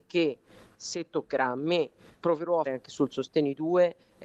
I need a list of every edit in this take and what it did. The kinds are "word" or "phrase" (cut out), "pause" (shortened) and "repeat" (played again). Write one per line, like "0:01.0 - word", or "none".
0:02.2 - word
0:02.7 - word

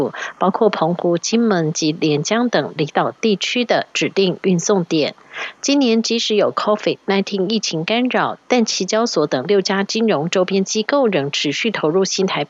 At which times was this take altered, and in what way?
none

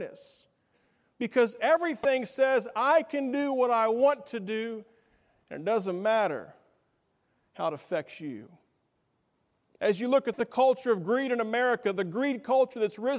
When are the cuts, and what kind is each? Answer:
none

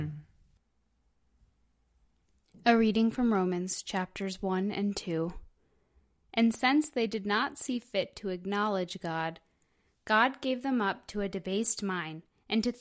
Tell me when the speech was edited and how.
none

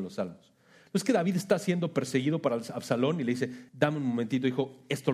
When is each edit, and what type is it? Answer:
0:03.7 - pause

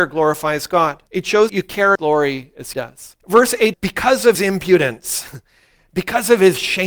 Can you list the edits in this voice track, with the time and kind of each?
0:01.1 - pause
0:01.5 - word
0:02.0 - phrase
0:02.7 - word
0:03.2 - pause
0:03.7 - word
0:04.3 - word

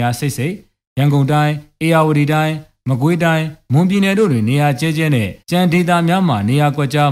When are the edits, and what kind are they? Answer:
0:05.4 - pause

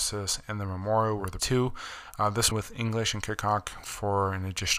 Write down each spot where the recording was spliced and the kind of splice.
0:01.4 - word
0:02.5 - word
0:03.8 - word

